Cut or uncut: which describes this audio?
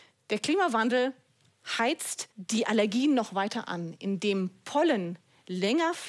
cut